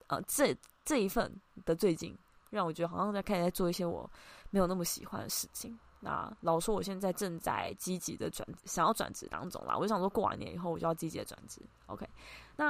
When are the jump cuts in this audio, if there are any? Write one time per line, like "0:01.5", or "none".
0:08.6